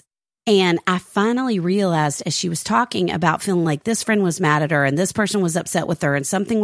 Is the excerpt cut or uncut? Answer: uncut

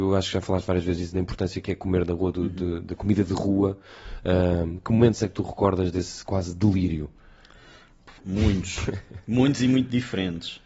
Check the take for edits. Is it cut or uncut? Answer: cut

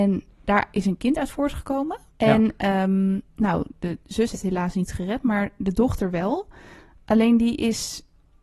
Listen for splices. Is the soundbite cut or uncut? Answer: cut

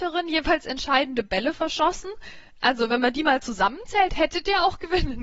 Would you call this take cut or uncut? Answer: uncut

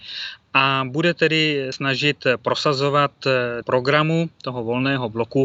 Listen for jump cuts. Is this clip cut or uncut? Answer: cut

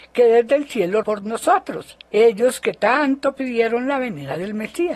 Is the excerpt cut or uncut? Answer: cut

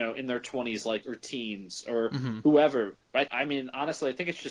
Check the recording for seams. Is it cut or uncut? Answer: cut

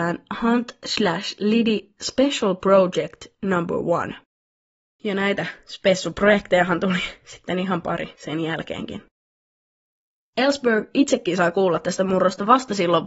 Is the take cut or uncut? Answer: uncut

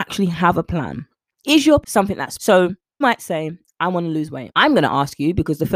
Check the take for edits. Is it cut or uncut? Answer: cut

